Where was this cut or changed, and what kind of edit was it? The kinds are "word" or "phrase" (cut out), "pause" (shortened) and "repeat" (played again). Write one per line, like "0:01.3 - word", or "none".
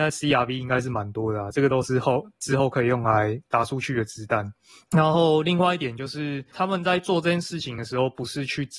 none